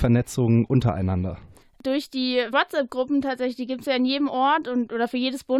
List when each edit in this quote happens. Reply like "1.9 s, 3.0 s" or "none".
1.6 s, 2.5 s